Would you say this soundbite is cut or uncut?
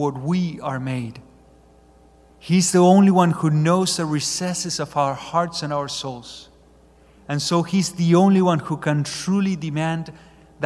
uncut